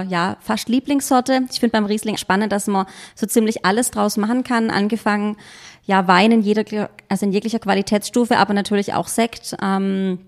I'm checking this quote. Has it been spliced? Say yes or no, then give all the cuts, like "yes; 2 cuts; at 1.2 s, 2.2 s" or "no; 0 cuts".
yes; 1 cut; at 2.2 s